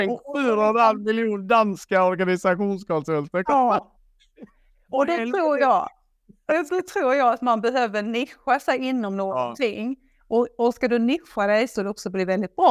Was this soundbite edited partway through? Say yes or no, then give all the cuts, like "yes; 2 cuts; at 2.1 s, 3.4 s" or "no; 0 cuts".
yes; 1 cut; at 11.7 s